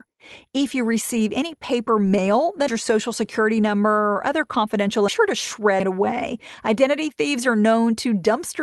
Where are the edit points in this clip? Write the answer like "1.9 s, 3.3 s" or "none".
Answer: 2.7 s, 5.1 s, 5.8 s